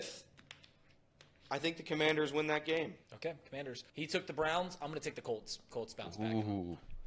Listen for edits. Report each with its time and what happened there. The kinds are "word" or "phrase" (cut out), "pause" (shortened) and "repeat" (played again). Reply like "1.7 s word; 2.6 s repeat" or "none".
3.0 s pause; 3.9 s pause; 5.7 s phrase